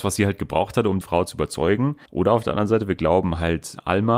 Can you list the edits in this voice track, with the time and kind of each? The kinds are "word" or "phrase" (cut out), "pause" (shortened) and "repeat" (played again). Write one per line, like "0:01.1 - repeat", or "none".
0:01.0 - word
0:02.1 - pause